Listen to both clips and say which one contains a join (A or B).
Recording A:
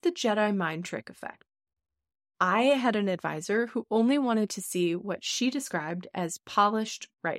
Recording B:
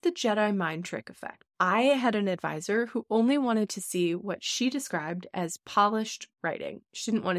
B